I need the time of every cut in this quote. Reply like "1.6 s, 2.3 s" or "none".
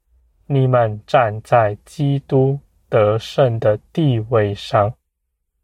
none